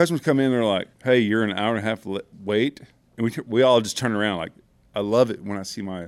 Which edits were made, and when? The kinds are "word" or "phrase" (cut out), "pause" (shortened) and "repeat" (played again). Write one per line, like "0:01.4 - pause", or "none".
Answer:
0:00.9 - pause
0:02.3 - pause